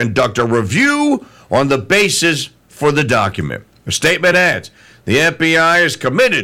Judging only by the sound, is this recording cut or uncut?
uncut